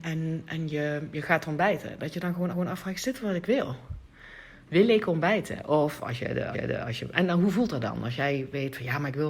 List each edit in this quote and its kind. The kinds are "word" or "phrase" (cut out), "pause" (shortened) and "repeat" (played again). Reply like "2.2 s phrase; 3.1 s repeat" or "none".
2.5 s repeat; 6.5 s repeat; 7.1 s word